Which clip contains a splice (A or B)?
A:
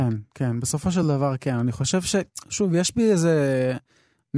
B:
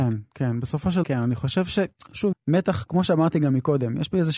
B